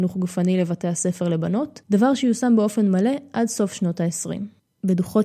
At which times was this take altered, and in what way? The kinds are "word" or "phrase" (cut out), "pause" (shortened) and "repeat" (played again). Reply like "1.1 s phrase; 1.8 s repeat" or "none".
1.8 s pause

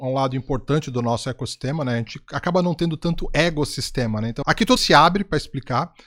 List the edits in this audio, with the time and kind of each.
4.4 s word; 4.8 s word

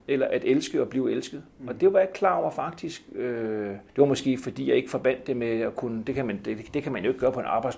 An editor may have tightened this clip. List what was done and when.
3.9 s pause

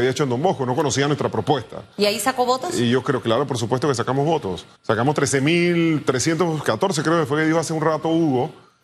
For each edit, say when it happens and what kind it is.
4.7 s pause

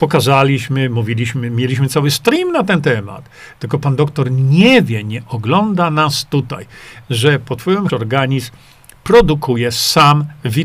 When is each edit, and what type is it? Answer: 7.9 s phrase

